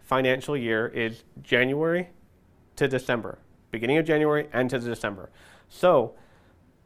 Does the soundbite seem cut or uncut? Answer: uncut